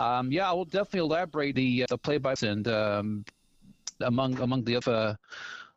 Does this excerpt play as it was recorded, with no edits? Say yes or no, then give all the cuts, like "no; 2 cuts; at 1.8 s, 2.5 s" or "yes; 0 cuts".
no; 5 cuts; at 1.5 s, 1.9 s, 2.4 s, 4.0 s, 4.8 s